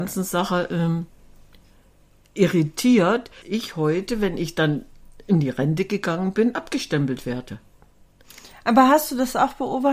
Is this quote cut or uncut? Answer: cut